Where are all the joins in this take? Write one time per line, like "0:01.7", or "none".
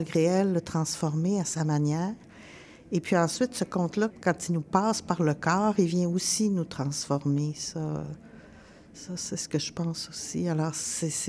0:04.1